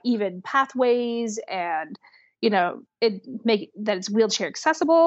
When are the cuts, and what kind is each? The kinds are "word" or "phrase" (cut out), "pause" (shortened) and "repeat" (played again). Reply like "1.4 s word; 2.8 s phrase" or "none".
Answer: 2.9 s word

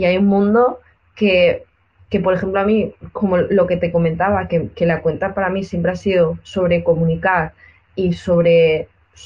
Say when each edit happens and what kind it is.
none

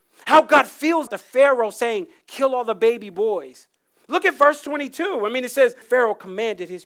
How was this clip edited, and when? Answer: 1.1 s word; 5.8 s word

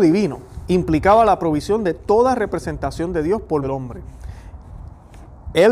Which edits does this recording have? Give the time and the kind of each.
3.6 s word

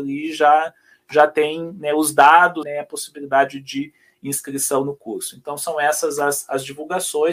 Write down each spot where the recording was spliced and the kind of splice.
2.6 s phrase

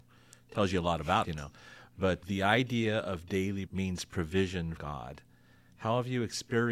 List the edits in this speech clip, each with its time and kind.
1.2 s word; 2.2 s word; 3.7 s word; 4.8 s word

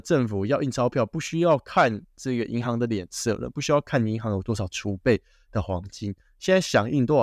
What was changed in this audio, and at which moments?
none

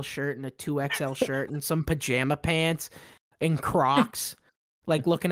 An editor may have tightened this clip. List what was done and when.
none

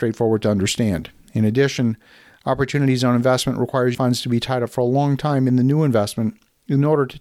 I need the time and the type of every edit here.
3.9 s word

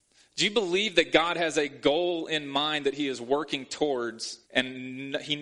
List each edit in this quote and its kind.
4.4 s pause

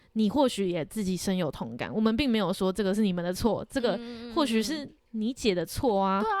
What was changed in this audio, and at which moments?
5.0 s pause

